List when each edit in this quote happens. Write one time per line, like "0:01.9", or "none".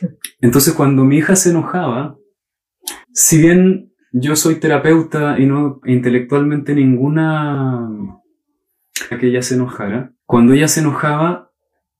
0:03.0
0:05.8
0:09.1
0:10.2